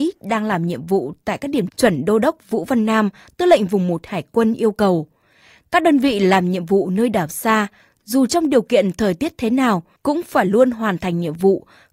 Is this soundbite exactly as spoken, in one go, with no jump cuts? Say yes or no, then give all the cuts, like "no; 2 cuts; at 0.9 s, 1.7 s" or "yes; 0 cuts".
no; 1 cut; at 1.7 s